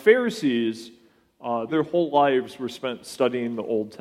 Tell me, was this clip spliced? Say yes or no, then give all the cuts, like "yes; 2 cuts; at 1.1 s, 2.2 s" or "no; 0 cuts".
yes; 1 cut; at 1.7 s